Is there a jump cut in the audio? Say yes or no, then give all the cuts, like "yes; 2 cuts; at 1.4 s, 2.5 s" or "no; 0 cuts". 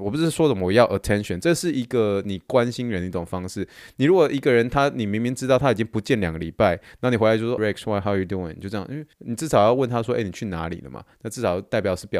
yes; 2 cuts; at 7.6 s, 9.1 s